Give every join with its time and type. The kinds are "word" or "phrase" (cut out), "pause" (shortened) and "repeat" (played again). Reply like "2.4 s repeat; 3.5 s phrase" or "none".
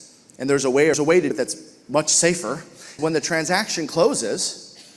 0.9 s word; 1.3 s word; 3.0 s phrase